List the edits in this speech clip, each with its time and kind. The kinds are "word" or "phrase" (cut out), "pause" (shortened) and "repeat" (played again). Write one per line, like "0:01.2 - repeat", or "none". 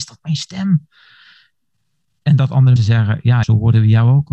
0:02.8 - word
0:03.4 - word

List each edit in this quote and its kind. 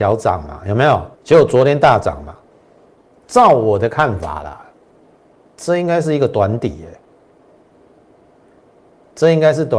0:01.1 - pause
0:03.0 - pause

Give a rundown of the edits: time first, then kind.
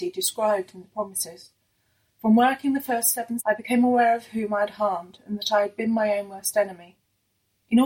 0:03.4 - word

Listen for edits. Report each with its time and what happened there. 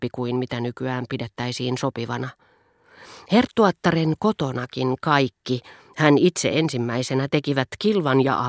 none

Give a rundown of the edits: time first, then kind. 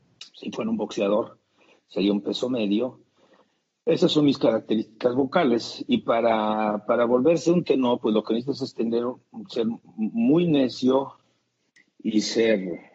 none

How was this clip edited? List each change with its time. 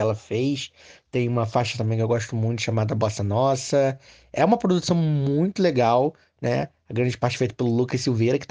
none

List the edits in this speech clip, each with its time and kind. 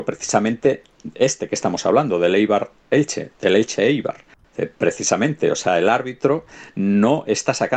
0:04.4 - pause

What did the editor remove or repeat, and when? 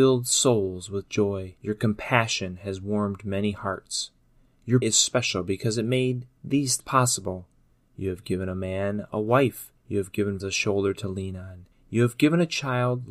0:01.6 - pause
0:04.8 - word
0:06.8 - word
0:09.8 - pause
0:10.4 - word

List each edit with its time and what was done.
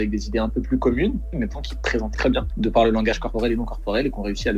0:01.5 - word
0:02.1 - word

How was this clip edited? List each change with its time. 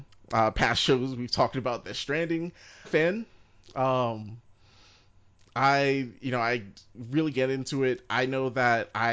0:02.8 - phrase
0:07.3 - word

